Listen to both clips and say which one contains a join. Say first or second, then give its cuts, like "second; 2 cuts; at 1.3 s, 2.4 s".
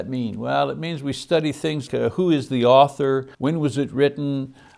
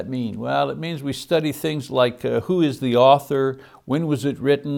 first; 2 cuts; at 1.9 s, 3.3 s